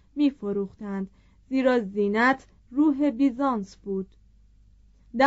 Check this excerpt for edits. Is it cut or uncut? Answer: uncut